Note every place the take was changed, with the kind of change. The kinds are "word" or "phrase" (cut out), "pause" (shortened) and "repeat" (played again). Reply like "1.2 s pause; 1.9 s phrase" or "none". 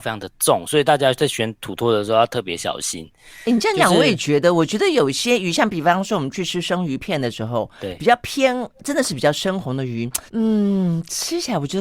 10.3 s pause